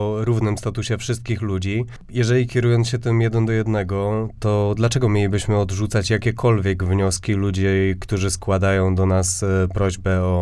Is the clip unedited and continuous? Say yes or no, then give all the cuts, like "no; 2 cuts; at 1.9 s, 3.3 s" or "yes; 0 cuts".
yes; 0 cuts